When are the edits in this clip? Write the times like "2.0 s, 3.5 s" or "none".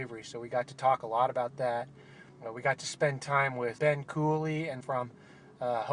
2.3 s, 3.8 s, 4.8 s